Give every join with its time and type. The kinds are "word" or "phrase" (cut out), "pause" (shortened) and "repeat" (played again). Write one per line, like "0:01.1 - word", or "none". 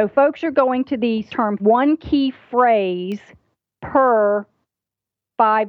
0:01.3 - word
0:01.6 - phrase